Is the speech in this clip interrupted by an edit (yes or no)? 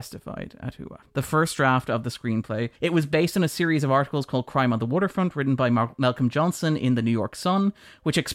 yes